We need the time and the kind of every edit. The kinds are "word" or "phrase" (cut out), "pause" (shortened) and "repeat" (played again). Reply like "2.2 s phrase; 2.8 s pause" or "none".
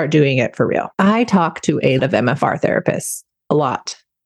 0.9 s pause; 2.0 s word